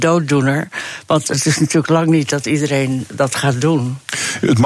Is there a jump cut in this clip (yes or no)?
no